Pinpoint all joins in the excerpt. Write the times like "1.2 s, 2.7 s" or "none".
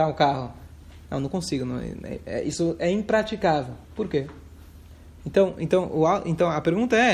3.8 s

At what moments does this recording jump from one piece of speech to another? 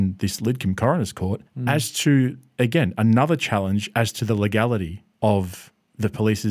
1.5 s, 5.1 s

